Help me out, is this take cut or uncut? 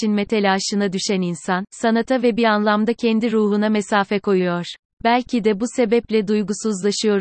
cut